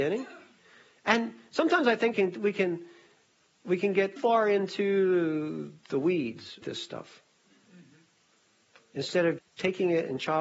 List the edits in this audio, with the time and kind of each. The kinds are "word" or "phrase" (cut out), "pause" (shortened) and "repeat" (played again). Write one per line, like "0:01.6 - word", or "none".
0:02.1 - word
0:04.2 - word
0:06.6 - word
0:09.4 - word